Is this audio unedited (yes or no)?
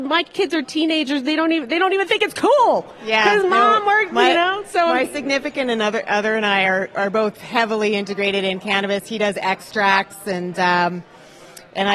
yes